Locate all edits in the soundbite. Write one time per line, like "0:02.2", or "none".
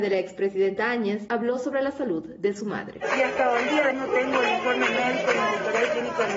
0:03.9